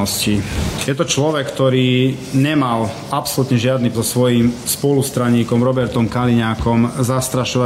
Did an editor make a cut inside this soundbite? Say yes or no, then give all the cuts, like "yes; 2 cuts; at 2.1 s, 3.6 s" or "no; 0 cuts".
yes; 1 cut; at 3.9 s